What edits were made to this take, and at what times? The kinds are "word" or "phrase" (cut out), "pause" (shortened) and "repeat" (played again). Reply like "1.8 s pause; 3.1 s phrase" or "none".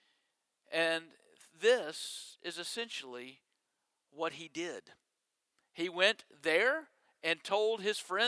none